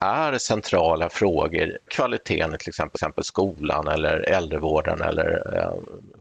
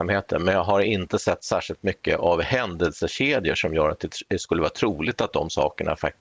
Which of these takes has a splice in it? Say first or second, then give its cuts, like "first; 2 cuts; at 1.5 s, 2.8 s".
first; 2 cuts; at 1.9 s, 2.9 s